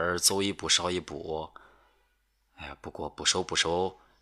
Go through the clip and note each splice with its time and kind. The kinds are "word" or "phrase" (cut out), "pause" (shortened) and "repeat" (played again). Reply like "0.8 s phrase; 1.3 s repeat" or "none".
none